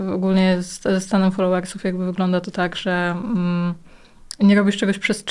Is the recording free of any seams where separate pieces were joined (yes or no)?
yes